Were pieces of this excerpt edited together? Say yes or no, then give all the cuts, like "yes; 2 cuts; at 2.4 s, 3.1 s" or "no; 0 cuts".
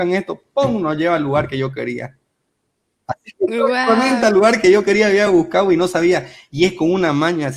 no; 0 cuts